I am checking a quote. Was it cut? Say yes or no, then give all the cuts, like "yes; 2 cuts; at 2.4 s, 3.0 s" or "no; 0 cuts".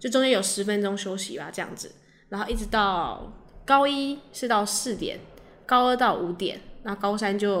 no; 0 cuts